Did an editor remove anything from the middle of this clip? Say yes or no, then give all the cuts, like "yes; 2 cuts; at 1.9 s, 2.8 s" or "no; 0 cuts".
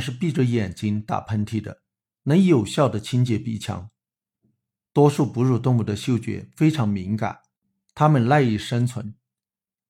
no; 0 cuts